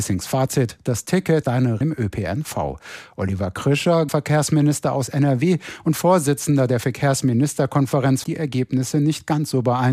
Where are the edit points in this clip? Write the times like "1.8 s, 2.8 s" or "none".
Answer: 1.4 s, 1.8 s, 4.1 s, 8.2 s